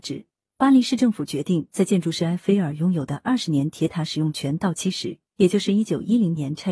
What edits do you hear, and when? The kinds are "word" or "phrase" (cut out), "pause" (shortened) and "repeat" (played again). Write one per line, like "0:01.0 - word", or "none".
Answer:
0:05.3 - pause